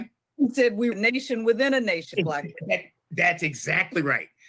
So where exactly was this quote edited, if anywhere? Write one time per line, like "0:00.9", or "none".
0:00.9
0:02.1